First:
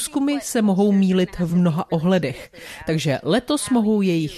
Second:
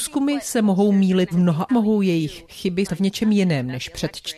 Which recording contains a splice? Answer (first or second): second